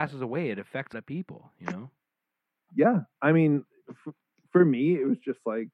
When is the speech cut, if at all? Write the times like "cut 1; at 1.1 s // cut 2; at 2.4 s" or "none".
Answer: cut 1; at 0.9 s